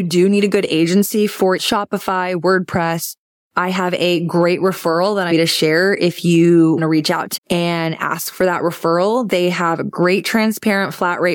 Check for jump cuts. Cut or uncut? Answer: cut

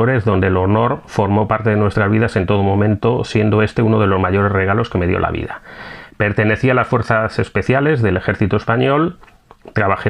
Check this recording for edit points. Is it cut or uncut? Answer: uncut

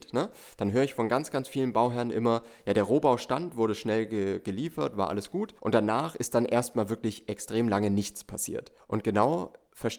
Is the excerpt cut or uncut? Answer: cut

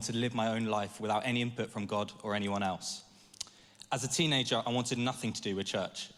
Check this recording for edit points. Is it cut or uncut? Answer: uncut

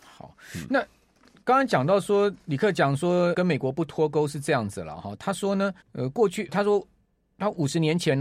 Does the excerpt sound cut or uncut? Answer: cut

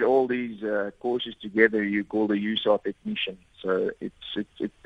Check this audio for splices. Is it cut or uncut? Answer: uncut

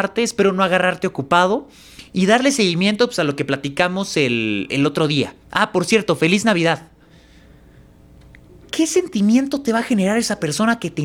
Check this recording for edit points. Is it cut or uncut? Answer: cut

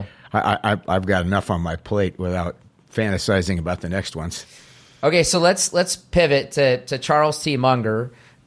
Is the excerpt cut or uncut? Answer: uncut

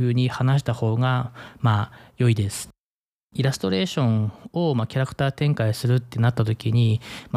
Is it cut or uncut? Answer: uncut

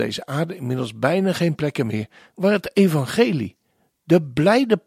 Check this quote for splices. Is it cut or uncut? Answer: uncut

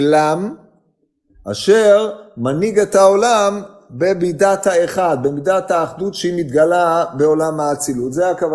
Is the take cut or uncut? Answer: uncut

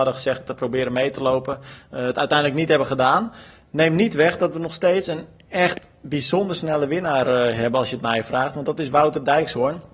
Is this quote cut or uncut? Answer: uncut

